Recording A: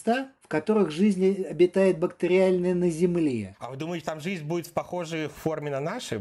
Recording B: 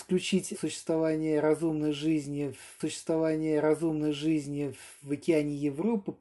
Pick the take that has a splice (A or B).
B